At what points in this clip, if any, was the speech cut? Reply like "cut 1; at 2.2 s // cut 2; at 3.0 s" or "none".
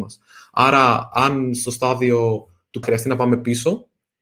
cut 1; at 2.8 s